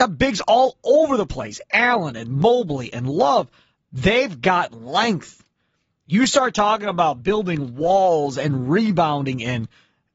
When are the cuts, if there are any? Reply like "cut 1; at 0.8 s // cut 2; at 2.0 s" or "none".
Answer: none